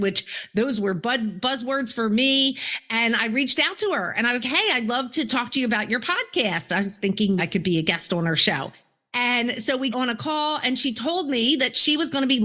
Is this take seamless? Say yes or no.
no